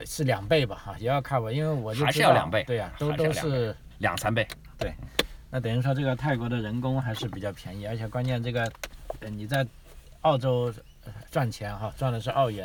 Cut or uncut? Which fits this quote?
cut